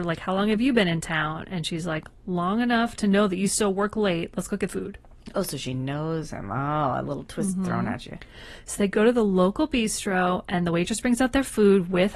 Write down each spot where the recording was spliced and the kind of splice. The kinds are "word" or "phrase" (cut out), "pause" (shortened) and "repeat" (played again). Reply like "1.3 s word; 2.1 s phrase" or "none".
4.7 s word